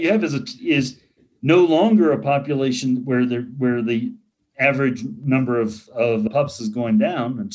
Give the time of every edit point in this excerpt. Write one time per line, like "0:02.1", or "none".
none